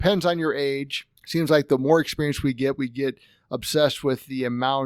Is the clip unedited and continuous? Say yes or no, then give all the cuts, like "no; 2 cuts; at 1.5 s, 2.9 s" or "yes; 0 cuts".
no; 1 cut; at 1.2 s